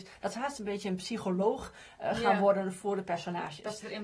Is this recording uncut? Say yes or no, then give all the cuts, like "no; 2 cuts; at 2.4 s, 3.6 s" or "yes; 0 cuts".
yes; 0 cuts